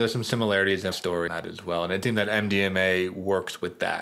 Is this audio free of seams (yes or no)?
no